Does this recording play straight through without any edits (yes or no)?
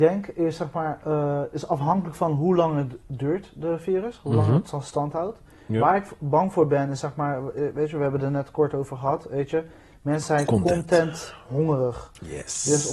yes